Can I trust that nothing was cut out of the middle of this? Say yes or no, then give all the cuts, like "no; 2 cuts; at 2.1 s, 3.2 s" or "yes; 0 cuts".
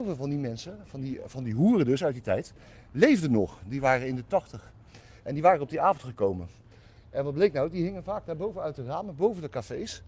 yes; 0 cuts